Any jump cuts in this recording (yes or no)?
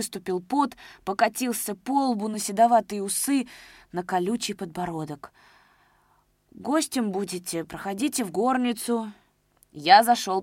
no